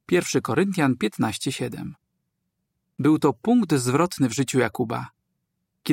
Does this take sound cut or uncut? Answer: uncut